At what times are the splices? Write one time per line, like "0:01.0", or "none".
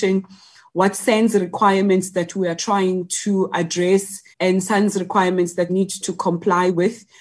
0:04.3
0:05.7
0:06.0